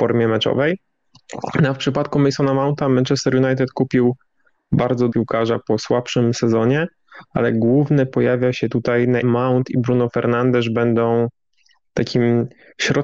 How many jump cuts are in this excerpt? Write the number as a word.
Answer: three